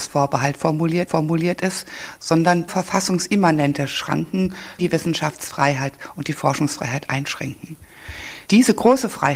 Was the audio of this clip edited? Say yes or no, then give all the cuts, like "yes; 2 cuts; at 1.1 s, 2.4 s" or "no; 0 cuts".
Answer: yes; 4 cuts; at 1.1 s, 2.7 s, 4.8 s, 8.5 s